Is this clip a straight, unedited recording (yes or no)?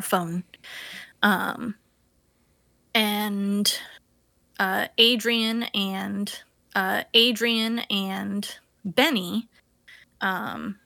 no